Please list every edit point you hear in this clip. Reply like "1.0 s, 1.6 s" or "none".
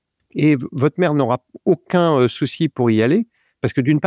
none